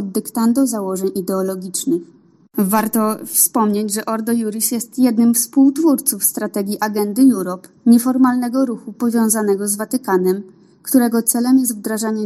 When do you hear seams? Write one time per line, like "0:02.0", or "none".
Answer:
none